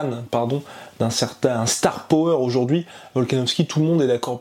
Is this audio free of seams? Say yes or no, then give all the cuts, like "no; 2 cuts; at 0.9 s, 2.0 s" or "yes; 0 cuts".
yes; 0 cuts